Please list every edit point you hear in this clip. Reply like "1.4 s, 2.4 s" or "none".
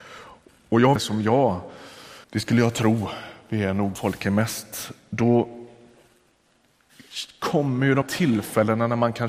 1.0 s, 2.2 s, 3.9 s, 8.0 s